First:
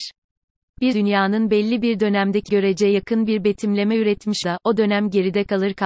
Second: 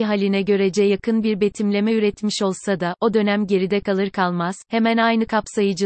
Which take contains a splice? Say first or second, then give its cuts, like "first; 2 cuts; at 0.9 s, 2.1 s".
first; 3 cuts; at 0.9 s, 2.5 s, 4.4 s